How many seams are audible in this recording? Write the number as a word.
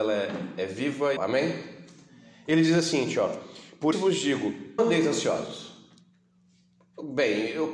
three